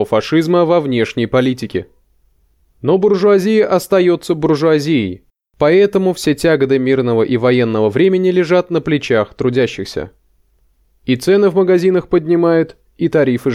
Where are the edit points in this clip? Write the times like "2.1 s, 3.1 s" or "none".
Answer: none